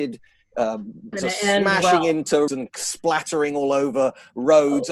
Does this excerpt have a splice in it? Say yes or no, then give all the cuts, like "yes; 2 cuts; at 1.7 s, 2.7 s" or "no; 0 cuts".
yes; 2 cuts; at 1.1 s, 2.5 s